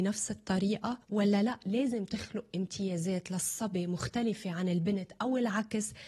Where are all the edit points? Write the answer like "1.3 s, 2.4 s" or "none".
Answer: 1.0 s